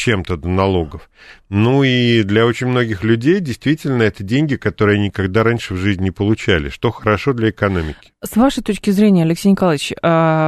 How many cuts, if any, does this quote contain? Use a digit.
0